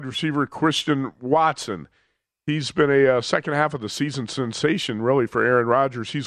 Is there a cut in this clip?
no; 0 cuts

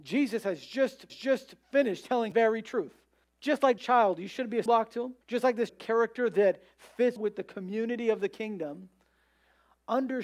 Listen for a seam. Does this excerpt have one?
yes; 8 cuts; at 1.1 s, 2.3 s, 3.2 s, 3.8 s, 4.7 s, 5.2 s, 5.7 s, 7.2 s

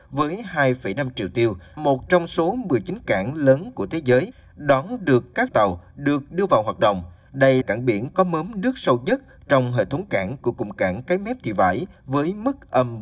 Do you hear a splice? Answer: yes; 3 cuts; at 1.8 s, 5.5 s, 7.6 s

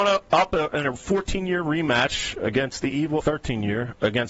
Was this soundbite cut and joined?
yes; 1 cut; at 3.2 s

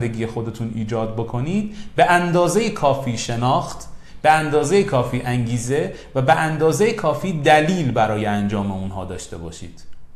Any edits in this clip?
no; 0 cuts

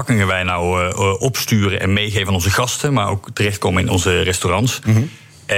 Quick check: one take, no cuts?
yes; 0 cuts

